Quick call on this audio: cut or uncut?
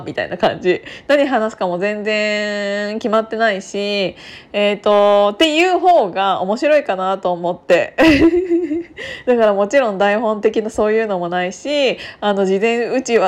uncut